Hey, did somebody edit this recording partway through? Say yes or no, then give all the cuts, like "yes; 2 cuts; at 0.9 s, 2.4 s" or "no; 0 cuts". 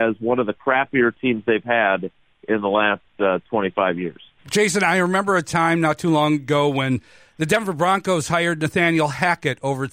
no; 0 cuts